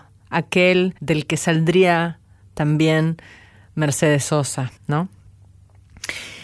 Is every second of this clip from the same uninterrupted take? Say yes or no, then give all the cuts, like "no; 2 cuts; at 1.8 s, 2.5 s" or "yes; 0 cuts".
no; 2 cuts; at 1.0 s, 4.8 s